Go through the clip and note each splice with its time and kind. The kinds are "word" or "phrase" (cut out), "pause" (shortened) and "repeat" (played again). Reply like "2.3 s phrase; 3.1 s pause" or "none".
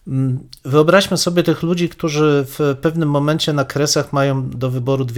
none